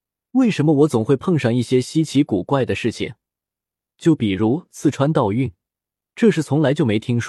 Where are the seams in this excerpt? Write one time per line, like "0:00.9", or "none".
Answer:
none

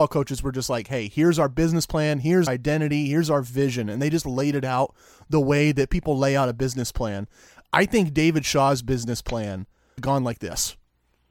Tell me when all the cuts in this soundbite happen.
0:02.5
0:10.0

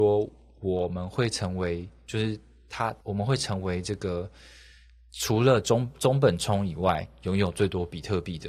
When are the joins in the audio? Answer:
0:03.0

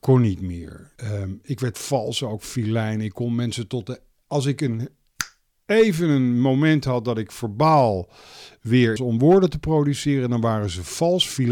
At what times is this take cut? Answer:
0:01.0
0:09.0

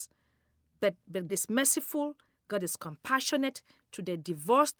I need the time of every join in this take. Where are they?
0:01.3

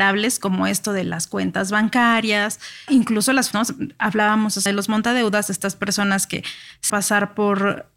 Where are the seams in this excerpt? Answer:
0:02.9
0:03.5
0:04.7
0:06.9

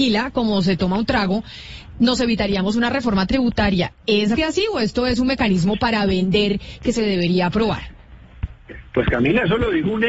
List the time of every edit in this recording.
0:04.4

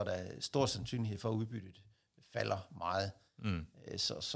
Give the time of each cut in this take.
none

